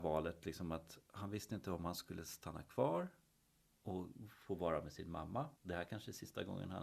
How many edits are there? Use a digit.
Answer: 1